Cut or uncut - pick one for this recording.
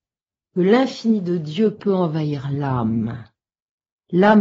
uncut